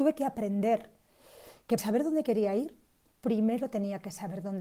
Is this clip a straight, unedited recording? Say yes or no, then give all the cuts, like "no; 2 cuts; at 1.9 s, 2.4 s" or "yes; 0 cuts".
no; 1 cut; at 1.8 s